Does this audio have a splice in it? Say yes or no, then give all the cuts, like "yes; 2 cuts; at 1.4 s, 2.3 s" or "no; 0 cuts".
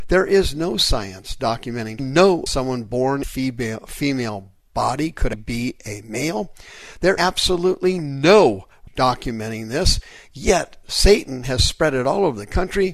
yes; 6 cuts; at 2.0 s, 2.5 s, 3.2 s, 5.3 s, 7.2 s, 8.9 s